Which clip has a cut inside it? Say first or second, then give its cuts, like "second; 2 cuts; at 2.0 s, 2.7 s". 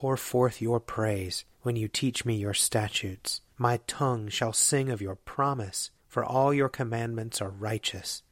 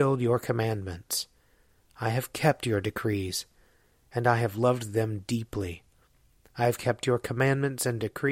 first; 3 cuts; at 1.5 s, 3.5 s, 6.0 s